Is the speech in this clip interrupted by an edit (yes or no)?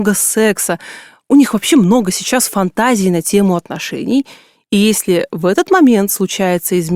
no